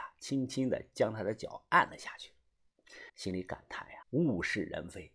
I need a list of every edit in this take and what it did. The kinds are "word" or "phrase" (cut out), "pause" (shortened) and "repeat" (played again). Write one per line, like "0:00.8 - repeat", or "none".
0:03.1 - pause
0:04.0 - pause